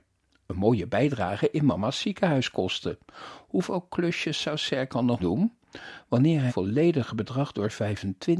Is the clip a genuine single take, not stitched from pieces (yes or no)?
no